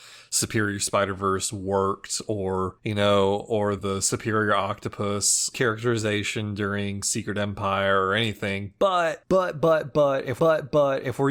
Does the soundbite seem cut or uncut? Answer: cut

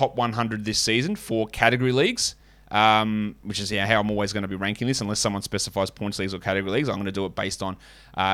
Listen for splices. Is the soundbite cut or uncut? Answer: uncut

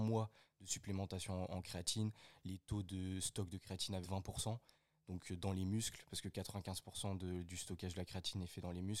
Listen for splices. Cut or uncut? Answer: cut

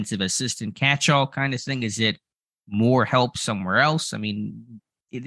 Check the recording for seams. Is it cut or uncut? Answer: uncut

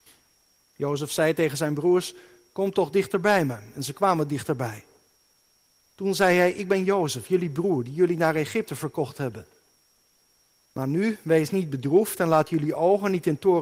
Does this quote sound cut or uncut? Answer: uncut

